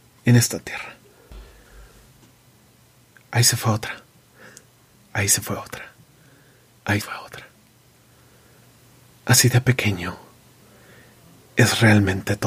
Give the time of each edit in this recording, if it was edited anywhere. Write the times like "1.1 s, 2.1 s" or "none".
7.0 s